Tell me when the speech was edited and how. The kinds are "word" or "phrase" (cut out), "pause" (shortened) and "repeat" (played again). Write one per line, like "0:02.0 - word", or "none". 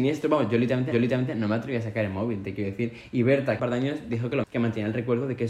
0:00.9 - repeat
0:03.6 - phrase
0:04.4 - word